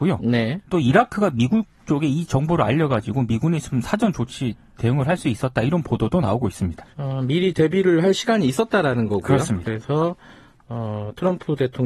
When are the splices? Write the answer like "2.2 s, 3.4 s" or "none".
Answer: 6.9 s